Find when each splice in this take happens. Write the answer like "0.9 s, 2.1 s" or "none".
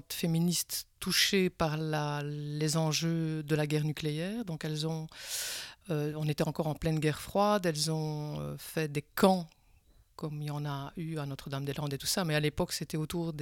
none